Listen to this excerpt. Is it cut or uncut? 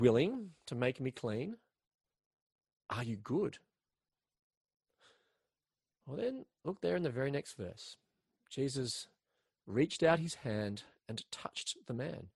uncut